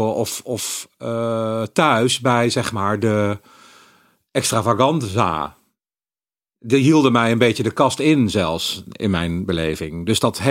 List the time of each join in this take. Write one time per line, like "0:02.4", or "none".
none